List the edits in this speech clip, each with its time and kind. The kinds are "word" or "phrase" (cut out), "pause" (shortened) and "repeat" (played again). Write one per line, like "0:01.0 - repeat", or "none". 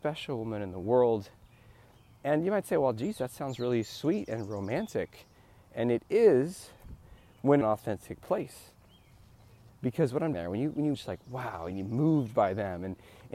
0:07.6 - phrase
0:10.3 - word
0:10.9 - phrase